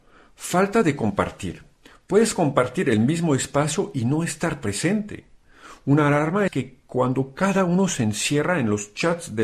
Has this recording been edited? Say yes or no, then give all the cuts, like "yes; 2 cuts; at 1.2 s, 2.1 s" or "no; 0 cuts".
yes; 1 cut; at 6.5 s